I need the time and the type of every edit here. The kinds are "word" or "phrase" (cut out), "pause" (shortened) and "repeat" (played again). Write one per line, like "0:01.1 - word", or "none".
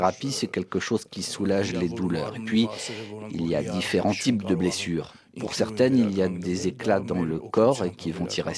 none